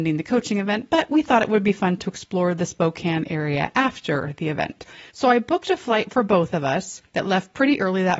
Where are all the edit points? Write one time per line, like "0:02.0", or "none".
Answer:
0:05.1
0:07.1

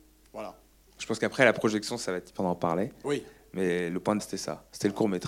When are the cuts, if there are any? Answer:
0:02.4
0:04.2

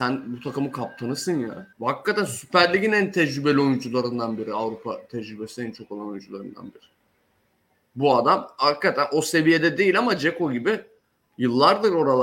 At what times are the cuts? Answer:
0:01.7

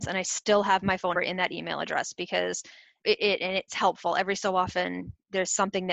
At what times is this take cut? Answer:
0:01.1
0:03.0
0:03.7

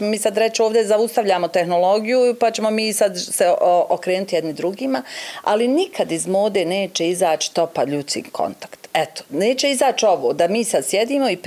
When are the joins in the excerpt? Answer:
none

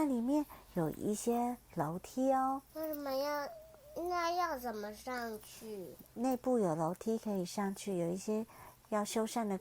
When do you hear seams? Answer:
0:01.6
0:02.7

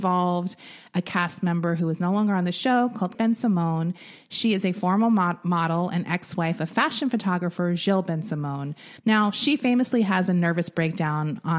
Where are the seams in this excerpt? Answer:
0:03.1
0:09.0

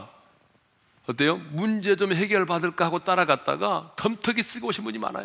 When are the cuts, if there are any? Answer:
none

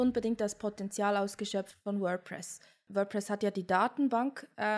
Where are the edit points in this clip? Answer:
none

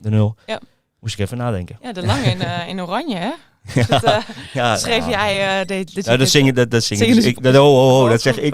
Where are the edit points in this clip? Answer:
none

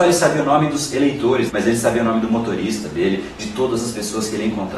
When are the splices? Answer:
0:01.5

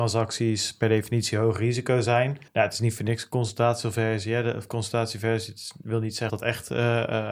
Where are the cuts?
0:02.5
0:06.3

